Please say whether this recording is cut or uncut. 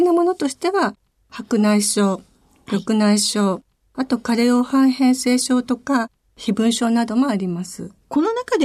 uncut